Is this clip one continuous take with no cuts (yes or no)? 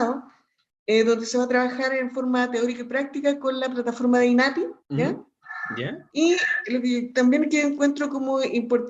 no